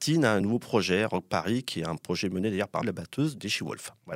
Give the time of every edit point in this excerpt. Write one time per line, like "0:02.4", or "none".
0:02.8

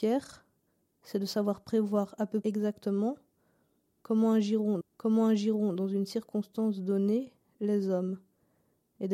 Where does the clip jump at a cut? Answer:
0:02.4
0:04.8

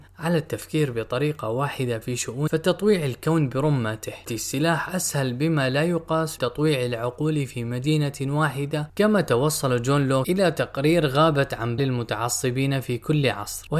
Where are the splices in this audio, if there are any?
0:02.5
0:04.3
0:06.4
0:11.8

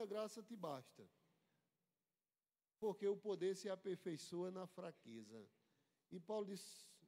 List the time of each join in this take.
none

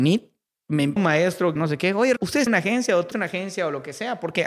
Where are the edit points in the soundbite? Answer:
0:01.0
0:01.6
0:02.2
0:02.5
0:03.1

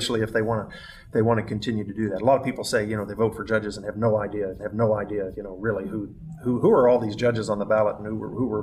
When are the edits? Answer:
0:04.6

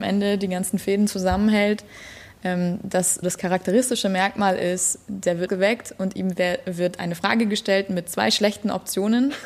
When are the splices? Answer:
0:03.2
0:05.5

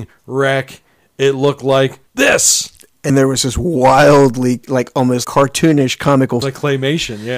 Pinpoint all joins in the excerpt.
0:02.1
0:03.1
0:04.6
0:05.2
0:06.4

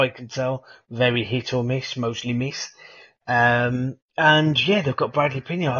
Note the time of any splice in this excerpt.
0:04.0

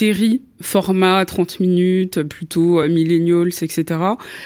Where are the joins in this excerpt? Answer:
none

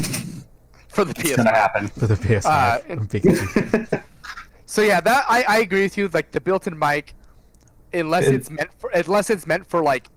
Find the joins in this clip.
none

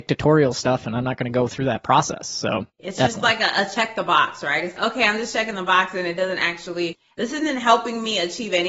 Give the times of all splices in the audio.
0:02.7
0:04.8

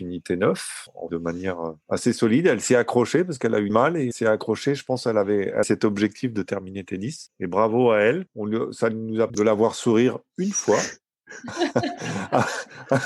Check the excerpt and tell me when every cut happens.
0:01.1
0:03.7
0:04.1
0:05.6
0:09.3

